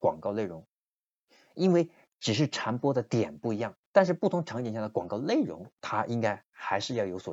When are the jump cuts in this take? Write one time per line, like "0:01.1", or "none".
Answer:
0:05.8